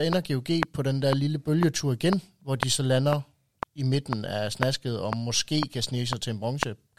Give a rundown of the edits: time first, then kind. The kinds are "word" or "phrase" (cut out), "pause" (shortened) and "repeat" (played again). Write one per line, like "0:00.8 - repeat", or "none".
none